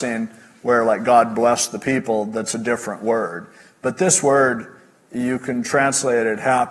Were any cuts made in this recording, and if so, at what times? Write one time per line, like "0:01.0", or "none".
none